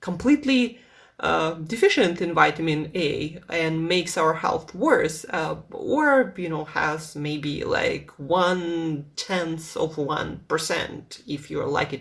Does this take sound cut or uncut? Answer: uncut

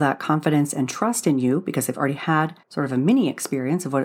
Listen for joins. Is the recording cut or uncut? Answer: cut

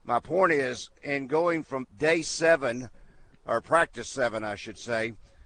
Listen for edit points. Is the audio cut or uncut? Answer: cut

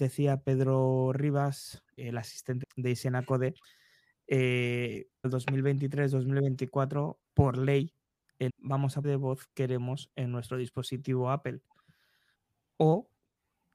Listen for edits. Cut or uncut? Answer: cut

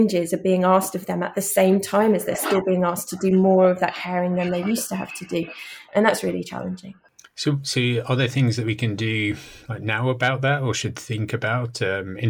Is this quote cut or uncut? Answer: uncut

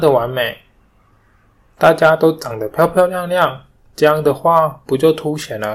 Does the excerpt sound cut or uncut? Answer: uncut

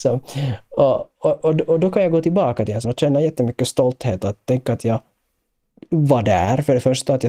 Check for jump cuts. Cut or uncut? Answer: cut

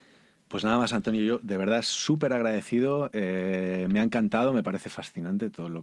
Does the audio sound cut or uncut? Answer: uncut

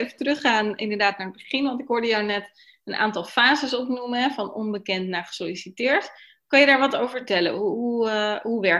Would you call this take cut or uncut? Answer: uncut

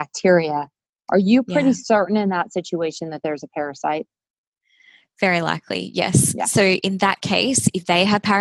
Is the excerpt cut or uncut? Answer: uncut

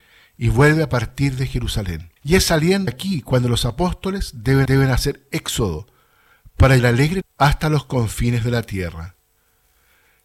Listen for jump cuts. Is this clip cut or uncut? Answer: cut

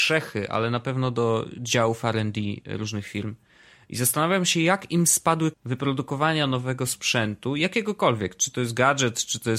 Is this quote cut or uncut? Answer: cut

